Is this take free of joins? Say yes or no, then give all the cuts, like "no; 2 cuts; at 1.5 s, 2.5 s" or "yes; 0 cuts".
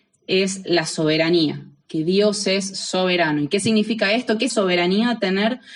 no; 1 cut; at 4.5 s